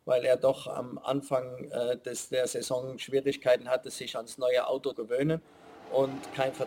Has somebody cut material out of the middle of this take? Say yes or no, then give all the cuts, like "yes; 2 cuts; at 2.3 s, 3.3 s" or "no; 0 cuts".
yes; 1 cut; at 4.9 s